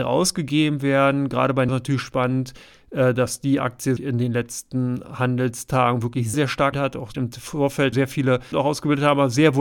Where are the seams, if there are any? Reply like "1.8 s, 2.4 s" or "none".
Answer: 1.7 s, 4.0 s, 6.3 s, 6.7 s, 7.1 s, 7.9 s, 8.5 s

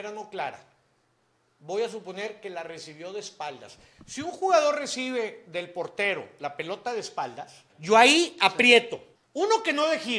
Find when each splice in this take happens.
7.7 s, 9.2 s

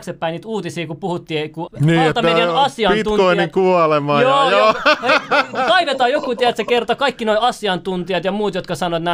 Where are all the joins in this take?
1.7 s

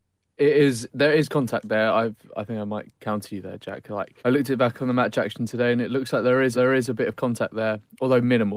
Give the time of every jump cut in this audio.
4.2 s, 6.5 s

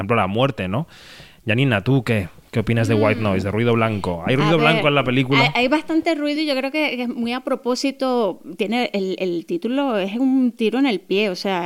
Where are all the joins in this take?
none

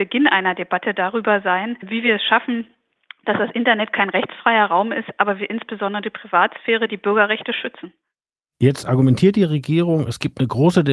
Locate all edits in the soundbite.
none

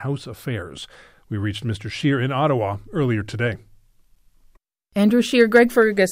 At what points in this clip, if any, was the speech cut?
none

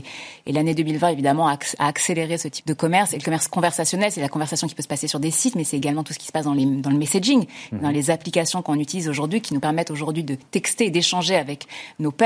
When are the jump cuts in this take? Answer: 2.6 s, 10.5 s

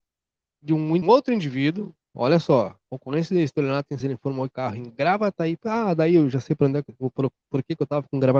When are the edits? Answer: 1.0 s, 2.8 s, 4.0 s, 4.5 s

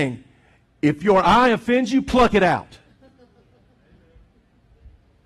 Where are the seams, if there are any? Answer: none

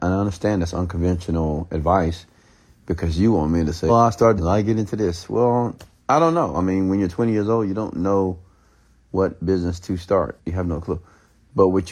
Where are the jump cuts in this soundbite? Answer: 3.9 s, 4.4 s, 10.4 s

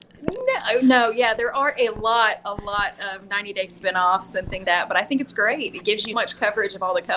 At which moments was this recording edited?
3.7 s, 4.6 s, 6.1 s

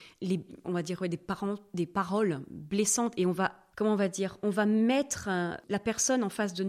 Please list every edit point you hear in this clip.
3.7 s

